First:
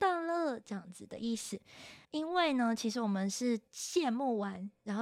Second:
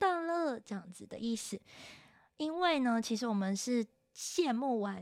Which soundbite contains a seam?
first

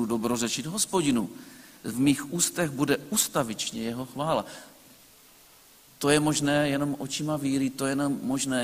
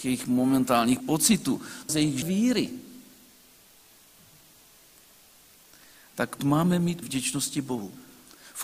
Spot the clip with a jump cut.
second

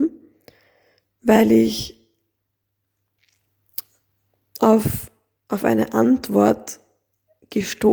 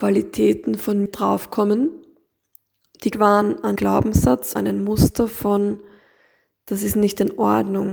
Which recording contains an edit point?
second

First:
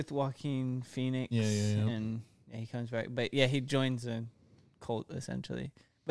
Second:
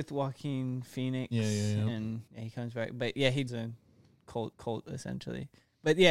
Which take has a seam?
second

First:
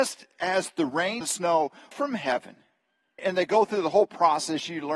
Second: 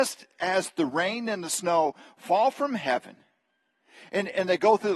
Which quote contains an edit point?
first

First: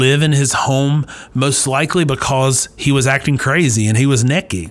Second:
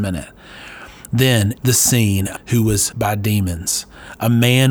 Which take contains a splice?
second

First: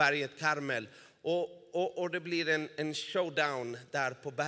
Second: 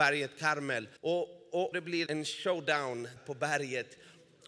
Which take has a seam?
second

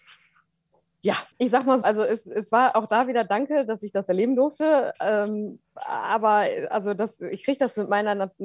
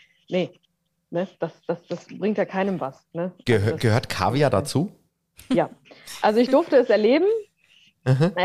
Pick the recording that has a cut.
first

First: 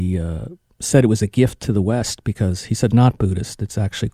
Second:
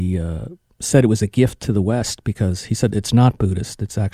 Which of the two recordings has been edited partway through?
first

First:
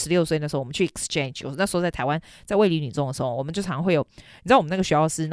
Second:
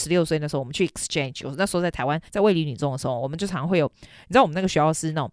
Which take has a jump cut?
second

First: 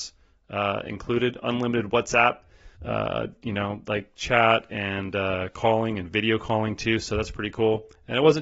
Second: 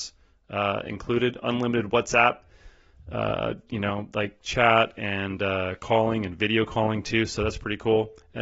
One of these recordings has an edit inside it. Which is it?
first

